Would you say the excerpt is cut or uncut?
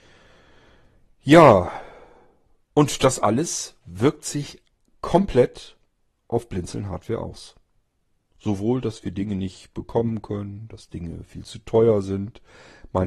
uncut